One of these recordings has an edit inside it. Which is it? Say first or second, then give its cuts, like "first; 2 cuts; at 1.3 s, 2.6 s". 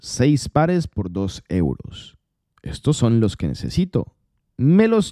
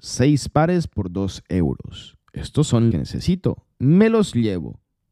second; 3 cuts; at 2.2 s, 2.9 s, 3.7 s